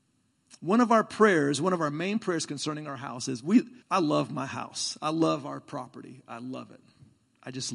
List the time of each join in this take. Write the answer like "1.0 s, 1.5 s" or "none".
3.8 s